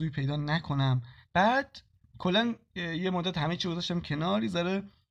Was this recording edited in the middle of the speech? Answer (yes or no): yes